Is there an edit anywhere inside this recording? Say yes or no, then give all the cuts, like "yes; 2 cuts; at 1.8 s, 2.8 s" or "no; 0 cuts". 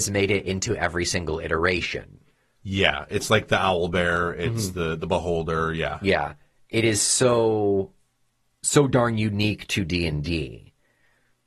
no; 0 cuts